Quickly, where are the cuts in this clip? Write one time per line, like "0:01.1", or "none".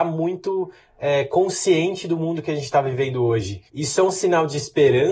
0:03.7